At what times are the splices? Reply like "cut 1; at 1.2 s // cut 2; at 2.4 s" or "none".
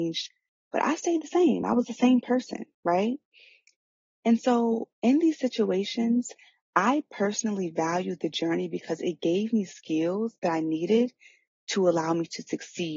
none